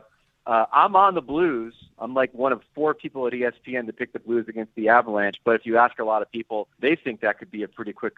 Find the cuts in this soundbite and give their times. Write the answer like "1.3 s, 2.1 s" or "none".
6.7 s